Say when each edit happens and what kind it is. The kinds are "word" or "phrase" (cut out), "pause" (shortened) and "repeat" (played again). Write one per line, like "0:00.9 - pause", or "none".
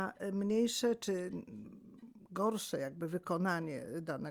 none